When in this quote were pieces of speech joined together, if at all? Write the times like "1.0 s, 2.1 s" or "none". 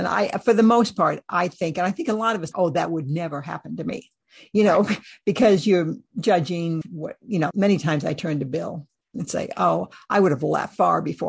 2.5 s, 6.8 s, 7.5 s, 9.1 s